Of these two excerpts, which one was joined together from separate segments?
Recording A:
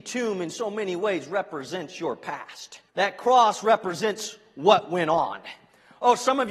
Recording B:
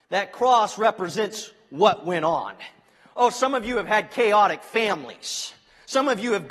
A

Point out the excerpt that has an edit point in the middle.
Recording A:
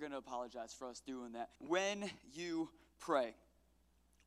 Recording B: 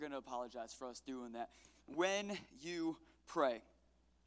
A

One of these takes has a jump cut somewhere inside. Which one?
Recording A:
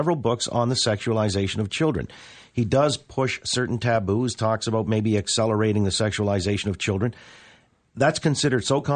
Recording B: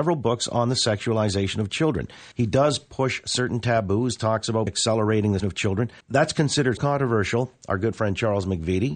B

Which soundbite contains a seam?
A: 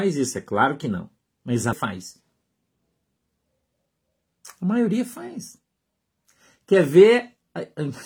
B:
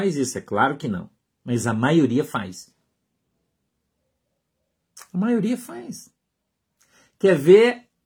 A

